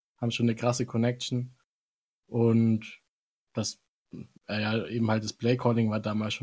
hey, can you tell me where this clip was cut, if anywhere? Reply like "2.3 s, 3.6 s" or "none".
none